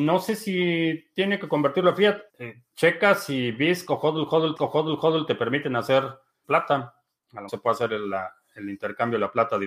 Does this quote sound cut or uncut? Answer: cut